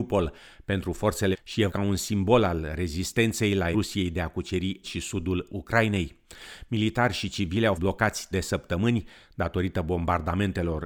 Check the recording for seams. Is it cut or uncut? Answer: cut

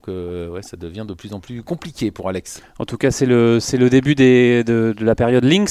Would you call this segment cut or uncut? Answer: uncut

